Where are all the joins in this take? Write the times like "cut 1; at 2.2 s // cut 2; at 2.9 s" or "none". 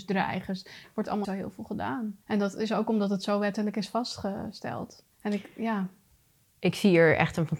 cut 1; at 1.2 s // cut 2; at 2.2 s // cut 3; at 5.1 s